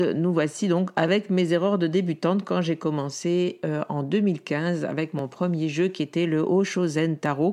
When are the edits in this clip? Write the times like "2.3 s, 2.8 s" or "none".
none